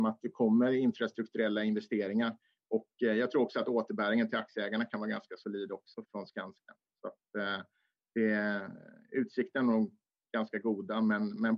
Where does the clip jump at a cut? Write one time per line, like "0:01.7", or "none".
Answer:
0:06.0